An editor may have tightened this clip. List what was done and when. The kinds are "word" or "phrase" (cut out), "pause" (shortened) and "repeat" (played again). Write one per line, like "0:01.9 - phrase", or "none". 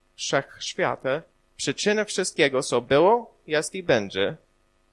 0:01.3 - pause

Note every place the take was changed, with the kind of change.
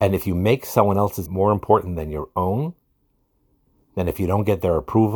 0:01.3 - word

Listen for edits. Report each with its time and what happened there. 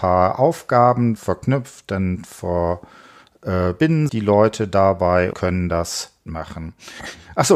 0:01.2 - word
0:04.1 - word
0:05.3 - word
0:06.3 - word

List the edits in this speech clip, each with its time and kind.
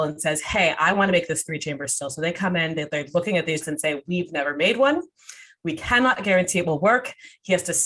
0:03.6 - word

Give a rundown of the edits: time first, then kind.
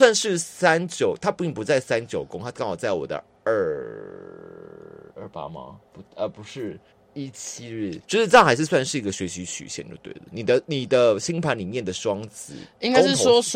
0:05.1 - pause
0:06.9 - pause
0:08.0 - pause

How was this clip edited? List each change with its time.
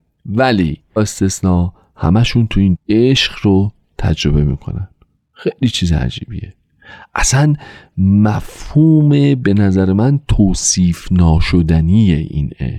0:01.0 - word
0:02.7 - word

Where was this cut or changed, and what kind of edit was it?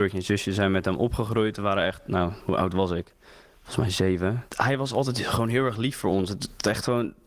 none

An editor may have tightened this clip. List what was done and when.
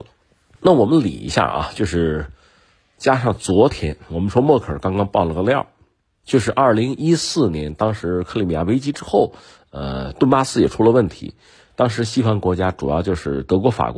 none

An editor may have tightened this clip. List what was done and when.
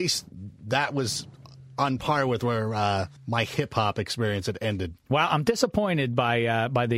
0:03.2 - pause

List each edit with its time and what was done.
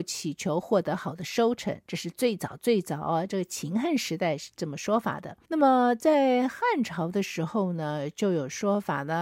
0:01.8 - pause
0:05.4 - pause

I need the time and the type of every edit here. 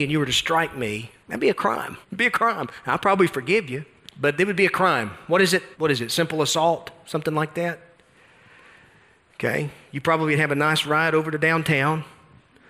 0:01.2 - pause
0:02.0 - pause
0:04.1 - phrase
0:05.7 - pause

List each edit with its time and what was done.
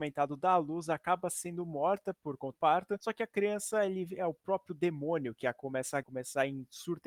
0:02.5 - word
0:06.0 - word

